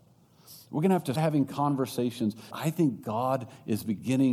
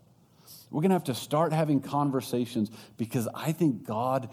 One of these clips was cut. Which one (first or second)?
first